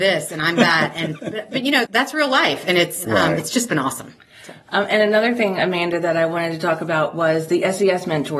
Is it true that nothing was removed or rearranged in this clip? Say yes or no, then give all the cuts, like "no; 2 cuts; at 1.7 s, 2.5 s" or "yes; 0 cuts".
no; 2 cuts; at 1.2 s, 1.8 s